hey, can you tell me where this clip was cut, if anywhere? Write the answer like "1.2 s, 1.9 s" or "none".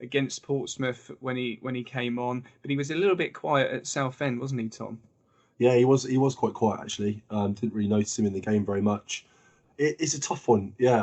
none